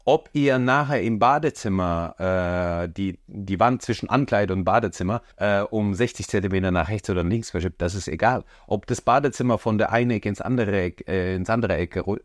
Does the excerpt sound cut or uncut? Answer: cut